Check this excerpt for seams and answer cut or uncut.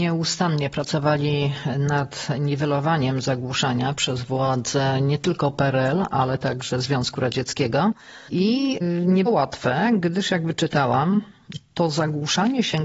cut